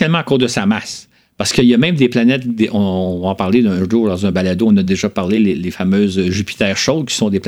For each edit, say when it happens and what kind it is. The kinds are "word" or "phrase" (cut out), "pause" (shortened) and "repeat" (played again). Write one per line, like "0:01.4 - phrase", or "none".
none